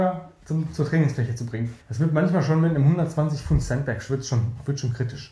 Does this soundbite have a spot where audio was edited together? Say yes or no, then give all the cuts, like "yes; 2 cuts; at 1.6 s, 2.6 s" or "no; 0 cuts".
yes; 1 cut; at 1.8 s